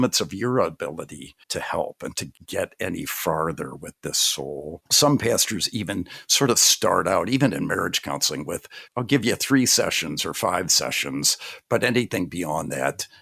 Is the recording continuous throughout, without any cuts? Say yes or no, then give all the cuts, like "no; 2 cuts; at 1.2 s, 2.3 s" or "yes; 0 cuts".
no; 4 cuts; at 1.4 s, 2.4 s, 4.9 s, 8.9 s